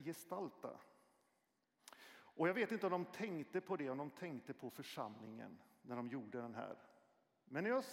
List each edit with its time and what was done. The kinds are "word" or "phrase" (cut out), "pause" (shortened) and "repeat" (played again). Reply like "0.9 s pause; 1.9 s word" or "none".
none